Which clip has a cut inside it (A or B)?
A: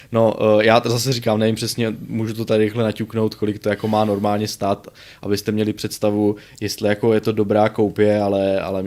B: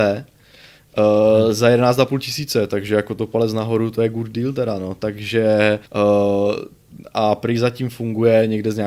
B